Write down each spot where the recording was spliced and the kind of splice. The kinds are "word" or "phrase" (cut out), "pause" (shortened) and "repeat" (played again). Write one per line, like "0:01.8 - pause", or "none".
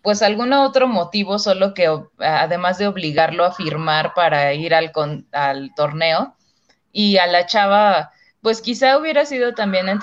none